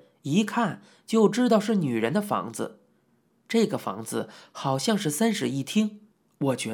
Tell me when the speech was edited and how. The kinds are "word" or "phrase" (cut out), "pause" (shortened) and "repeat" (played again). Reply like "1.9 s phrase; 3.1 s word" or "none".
none